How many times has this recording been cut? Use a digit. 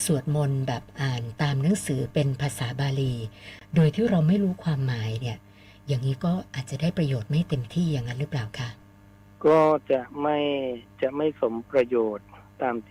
0